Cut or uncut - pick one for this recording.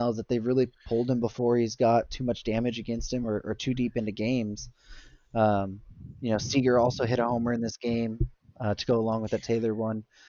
uncut